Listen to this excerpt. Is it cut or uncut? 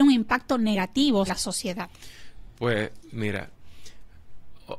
cut